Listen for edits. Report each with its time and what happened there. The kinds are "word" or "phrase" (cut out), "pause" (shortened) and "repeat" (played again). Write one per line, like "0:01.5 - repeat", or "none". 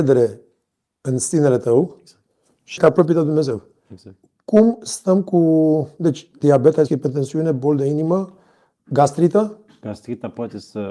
0:02.8 - word
0:06.9 - word